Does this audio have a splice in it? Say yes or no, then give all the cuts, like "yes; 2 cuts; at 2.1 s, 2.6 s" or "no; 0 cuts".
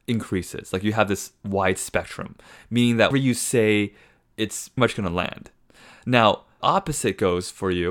yes; 3 cuts; at 3.1 s, 4.8 s, 6.6 s